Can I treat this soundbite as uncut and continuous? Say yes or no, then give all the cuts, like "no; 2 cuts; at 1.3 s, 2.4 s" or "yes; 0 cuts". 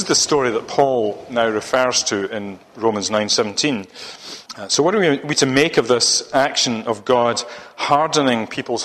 no; 1 cut; at 4.5 s